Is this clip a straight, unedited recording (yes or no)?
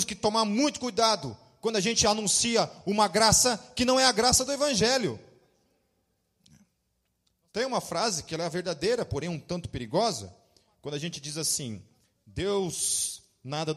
yes